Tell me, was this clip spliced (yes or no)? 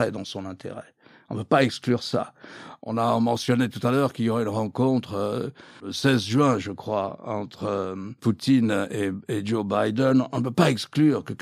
no